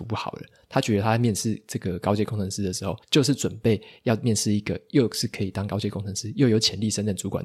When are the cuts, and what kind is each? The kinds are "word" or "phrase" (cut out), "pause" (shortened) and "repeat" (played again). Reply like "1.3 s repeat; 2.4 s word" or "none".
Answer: 3.0 s pause